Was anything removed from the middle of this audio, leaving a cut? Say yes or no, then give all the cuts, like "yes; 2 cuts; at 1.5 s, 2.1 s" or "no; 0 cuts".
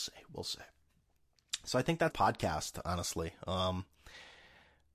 yes; 1 cut; at 2.1 s